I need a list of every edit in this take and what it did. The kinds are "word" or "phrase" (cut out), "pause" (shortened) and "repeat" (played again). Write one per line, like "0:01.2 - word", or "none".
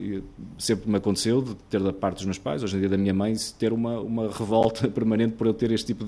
none